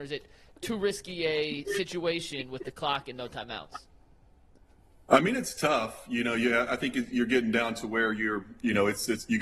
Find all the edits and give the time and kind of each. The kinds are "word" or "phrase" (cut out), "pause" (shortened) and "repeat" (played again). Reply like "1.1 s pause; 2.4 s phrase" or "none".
none